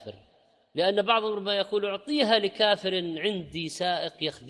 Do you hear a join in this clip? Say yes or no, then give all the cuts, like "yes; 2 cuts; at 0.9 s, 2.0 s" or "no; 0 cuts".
no; 0 cuts